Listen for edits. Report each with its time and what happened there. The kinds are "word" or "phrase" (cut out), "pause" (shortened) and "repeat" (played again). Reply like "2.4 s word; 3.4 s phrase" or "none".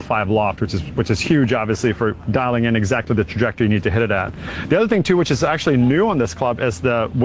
none